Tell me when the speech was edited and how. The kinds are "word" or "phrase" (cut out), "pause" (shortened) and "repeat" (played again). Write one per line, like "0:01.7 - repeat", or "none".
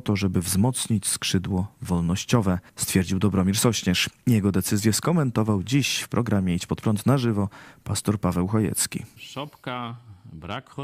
0:02.7 - pause